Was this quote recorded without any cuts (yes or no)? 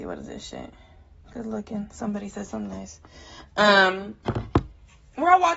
no